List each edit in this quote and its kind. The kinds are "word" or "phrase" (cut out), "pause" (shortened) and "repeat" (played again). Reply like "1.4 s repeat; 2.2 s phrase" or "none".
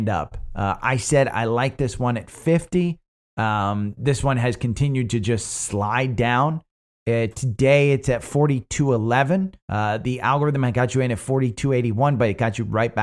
9.6 s pause